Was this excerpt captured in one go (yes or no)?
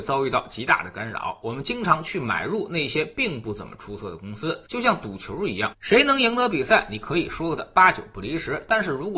no